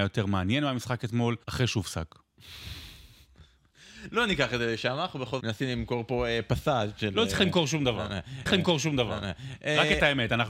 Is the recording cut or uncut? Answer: cut